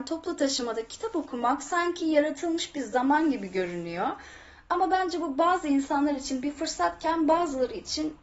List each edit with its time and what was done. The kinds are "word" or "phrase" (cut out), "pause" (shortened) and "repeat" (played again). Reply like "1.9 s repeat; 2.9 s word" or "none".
none